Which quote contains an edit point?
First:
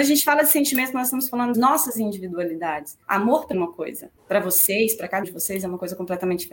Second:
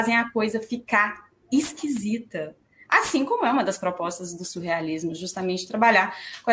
first; 5 cuts; at 1.5 s, 3.0 s, 3.5 s, 4.2 s, 5.2 s

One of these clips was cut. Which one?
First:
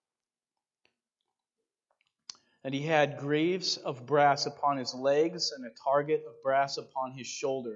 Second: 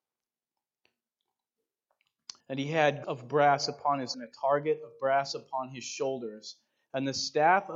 second; 3 cuts; at 2.4 s, 3.0 s, 4.1 s

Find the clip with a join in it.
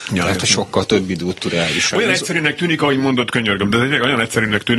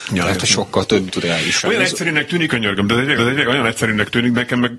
second; 3 cuts; at 1.1 s, 2.5 s, 3.2 s

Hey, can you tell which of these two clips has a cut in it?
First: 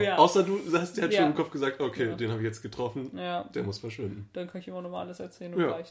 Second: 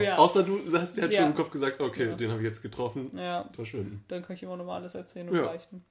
second; 1 cut; at 3.5 s

